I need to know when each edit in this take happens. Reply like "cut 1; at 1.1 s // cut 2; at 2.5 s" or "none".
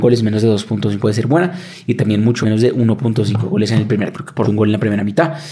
cut 1; at 1.0 s // cut 2; at 2.4 s // cut 3; at 4.1 s // cut 4; at 4.4 s